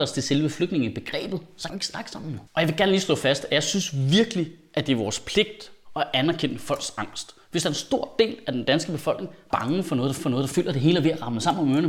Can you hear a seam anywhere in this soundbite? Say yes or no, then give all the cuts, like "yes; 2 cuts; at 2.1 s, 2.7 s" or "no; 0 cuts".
yes; 4 cuts; at 1.7 s, 2.5 s, 9.5 s, 10.2 s